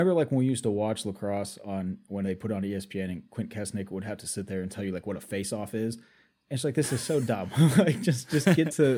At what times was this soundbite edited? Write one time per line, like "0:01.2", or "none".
none

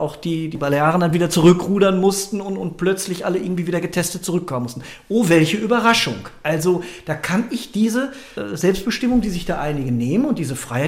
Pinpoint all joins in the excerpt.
none

